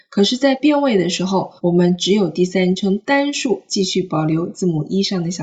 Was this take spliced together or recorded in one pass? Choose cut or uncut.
cut